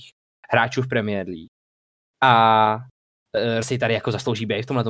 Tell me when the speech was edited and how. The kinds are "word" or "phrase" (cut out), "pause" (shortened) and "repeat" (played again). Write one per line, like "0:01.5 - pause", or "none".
0:03.6 - word